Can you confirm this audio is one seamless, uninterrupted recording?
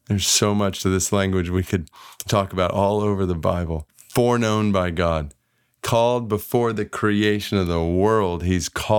yes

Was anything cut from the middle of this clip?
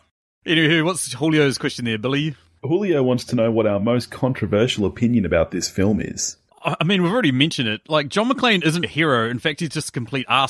yes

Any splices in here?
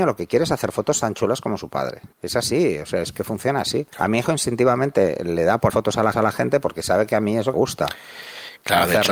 yes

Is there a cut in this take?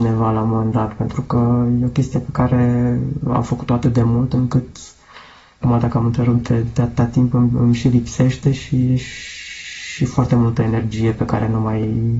no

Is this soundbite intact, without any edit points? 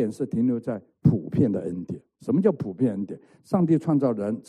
yes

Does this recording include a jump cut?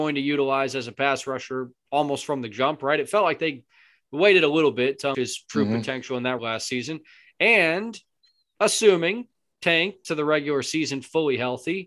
yes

